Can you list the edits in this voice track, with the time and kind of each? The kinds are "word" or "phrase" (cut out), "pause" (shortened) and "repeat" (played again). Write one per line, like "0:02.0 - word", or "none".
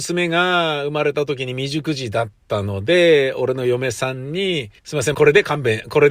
0:04.8 - pause
0:05.1 - phrase